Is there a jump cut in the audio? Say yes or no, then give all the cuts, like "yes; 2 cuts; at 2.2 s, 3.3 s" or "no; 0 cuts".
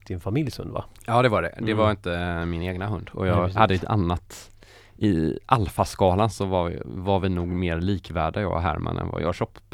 no; 0 cuts